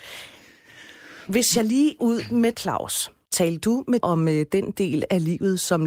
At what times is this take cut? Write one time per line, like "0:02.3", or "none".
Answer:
0:02.0
0:02.5
0:03.2
0:04.0